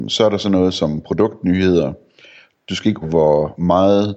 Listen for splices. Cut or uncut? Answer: cut